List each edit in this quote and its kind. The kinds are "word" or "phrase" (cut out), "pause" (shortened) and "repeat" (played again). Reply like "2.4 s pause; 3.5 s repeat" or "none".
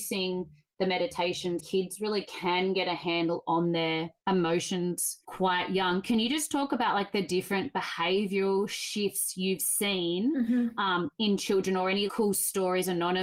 1.6 s word; 11.1 s pause; 12.1 s word